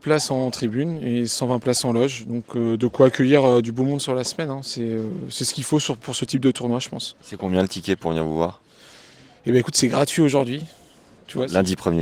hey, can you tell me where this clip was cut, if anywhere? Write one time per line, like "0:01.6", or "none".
none